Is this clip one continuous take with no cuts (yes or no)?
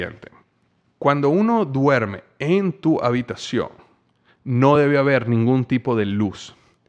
yes